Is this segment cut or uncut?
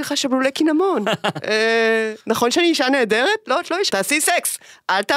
cut